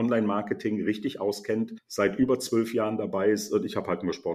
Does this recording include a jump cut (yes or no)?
no